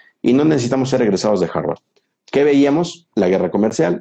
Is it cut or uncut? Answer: uncut